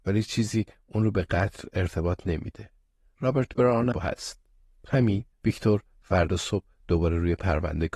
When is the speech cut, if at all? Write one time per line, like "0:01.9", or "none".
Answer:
0:03.9
0:05.3